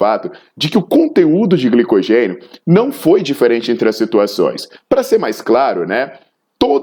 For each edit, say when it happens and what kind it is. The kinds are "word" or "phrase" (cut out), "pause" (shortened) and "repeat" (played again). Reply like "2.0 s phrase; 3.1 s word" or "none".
none

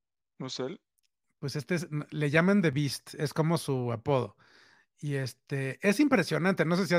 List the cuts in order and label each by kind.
none

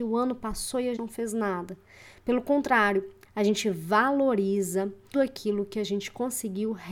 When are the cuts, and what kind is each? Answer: 1.0 s word; 3.2 s word; 5.1 s word

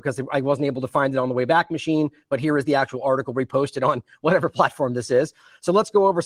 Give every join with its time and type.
none

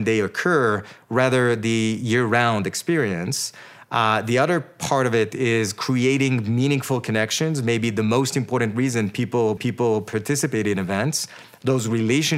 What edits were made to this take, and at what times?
9.6 s repeat

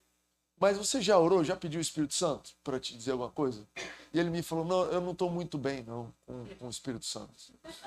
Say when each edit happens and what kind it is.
none

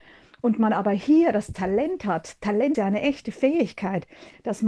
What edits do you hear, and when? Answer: 2.7 s word

